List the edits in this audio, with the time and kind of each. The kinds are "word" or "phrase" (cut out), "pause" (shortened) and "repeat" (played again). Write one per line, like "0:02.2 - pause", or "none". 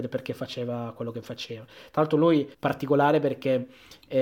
0:02.5 - pause